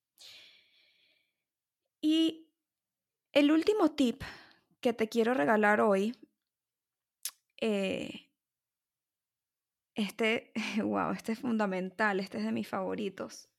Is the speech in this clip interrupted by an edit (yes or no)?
no